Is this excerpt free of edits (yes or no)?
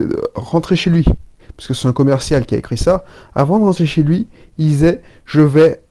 yes